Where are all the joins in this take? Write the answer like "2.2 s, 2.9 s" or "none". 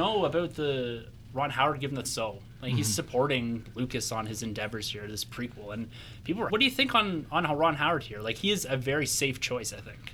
2.0 s, 6.5 s